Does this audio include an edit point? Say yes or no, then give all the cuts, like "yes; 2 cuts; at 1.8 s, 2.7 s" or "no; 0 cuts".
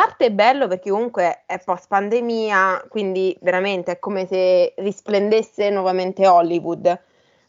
no; 0 cuts